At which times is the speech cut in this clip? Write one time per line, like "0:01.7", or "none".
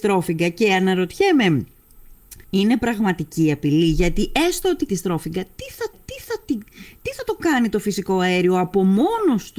0:02.4
0:04.9
0:05.9

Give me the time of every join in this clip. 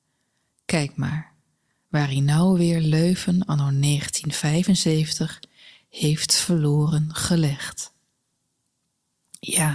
none

